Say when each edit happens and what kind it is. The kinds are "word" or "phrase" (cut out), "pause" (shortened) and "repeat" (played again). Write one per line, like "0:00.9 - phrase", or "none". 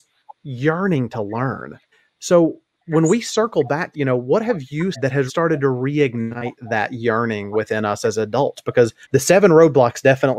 0:01.9 - pause
0:03.9 - phrase
0:04.9 - word
0:05.3 - word
0:09.0 - pause

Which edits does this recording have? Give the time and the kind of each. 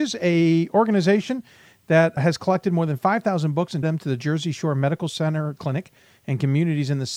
0:02.2 - word
0:03.8 - word
0:05.6 - word

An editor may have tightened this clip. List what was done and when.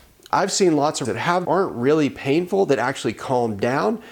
0:01.0 - word
0:01.4 - phrase

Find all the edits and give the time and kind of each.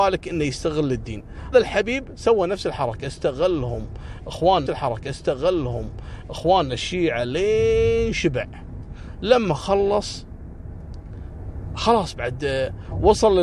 0:01.5 - word
0:04.7 - repeat

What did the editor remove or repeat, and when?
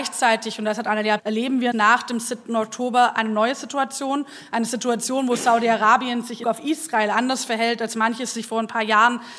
0:01.2 - phrase
0:01.7 - word
0:06.4 - word

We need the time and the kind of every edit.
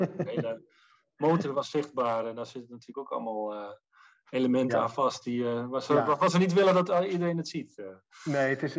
none

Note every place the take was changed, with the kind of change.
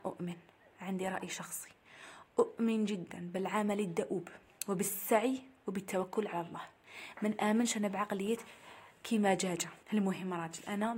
0:09.8 - pause

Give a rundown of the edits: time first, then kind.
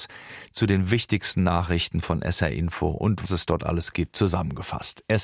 0:03.3 - word

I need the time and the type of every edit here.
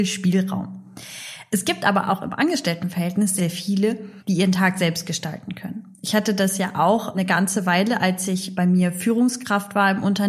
0:03.4 - word
0:04.2 - pause
0:07.1 - word
0:08.5 - word

